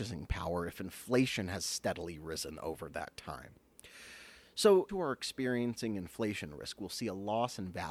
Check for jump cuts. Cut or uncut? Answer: cut